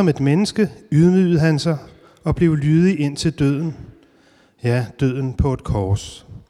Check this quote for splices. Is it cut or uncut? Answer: uncut